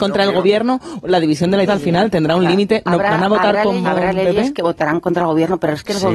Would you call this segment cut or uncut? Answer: cut